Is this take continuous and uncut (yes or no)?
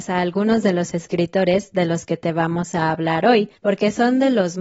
no